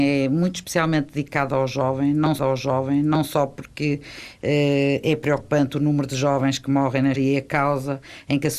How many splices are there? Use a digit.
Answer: 2